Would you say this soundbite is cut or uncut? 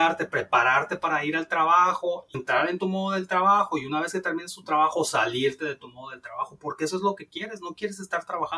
cut